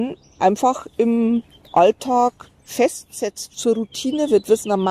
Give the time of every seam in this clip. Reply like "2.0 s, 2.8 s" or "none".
3.5 s